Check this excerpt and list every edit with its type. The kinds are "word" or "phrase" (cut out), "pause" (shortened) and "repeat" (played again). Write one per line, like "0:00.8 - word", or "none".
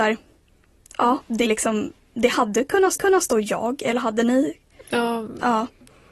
0:01.5 - phrase
0:03.0 - repeat